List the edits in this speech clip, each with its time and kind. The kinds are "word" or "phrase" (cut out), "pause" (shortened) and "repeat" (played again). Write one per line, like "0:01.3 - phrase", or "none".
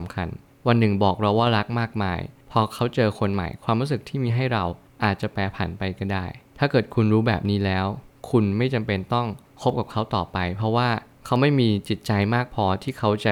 none